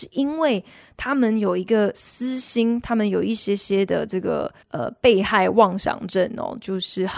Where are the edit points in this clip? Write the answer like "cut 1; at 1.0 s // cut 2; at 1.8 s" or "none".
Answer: cut 1; at 4.6 s